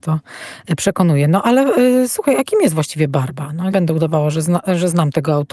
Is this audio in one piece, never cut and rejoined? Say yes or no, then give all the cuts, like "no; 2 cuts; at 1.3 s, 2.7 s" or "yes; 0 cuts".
no; 1 cut; at 3.7 s